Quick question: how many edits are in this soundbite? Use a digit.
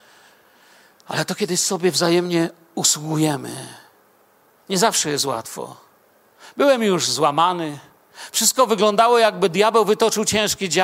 0